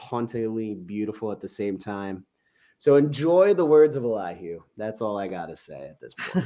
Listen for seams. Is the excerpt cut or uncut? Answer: uncut